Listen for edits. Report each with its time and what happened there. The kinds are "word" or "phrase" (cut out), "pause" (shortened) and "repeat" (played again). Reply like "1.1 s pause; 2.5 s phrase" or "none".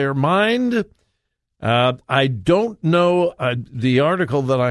none